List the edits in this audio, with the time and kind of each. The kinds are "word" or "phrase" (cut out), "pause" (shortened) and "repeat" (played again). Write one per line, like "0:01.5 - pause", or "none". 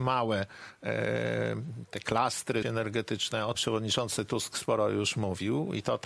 0:02.6 - word
0:03.5 - word